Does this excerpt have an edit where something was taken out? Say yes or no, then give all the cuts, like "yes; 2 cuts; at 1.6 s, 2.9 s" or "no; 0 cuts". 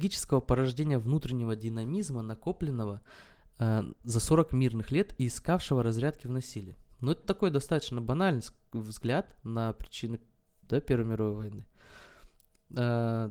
no; 0 cuts